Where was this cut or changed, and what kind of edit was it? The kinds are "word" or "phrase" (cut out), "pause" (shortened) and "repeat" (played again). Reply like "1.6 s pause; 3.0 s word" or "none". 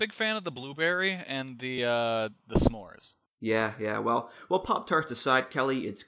none